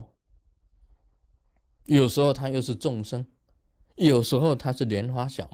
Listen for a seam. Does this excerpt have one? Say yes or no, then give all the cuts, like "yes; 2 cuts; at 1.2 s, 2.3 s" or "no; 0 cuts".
no; 0 cuts